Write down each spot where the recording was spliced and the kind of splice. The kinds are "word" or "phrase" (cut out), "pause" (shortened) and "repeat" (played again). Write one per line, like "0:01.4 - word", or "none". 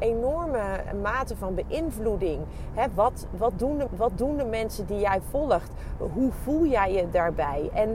0:03.9 - repeat